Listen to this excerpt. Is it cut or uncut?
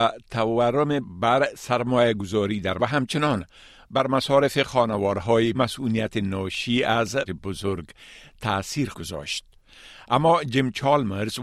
cut